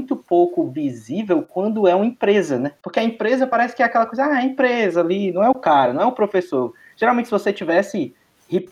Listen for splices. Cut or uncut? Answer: cut